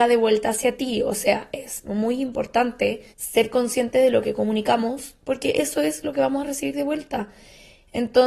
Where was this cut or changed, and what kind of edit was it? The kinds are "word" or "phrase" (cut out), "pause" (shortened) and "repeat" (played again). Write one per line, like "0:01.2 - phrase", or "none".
0:03.1 - pause